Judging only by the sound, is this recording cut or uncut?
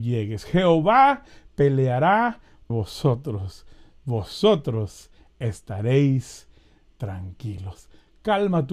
cut